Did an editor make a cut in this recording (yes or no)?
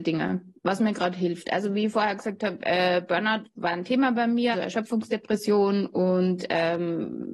yes